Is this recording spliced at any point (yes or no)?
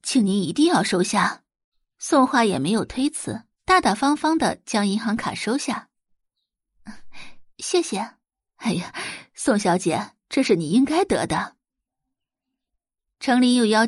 yes